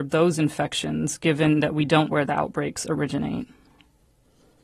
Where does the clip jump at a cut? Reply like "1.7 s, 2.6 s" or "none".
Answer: 2.1 s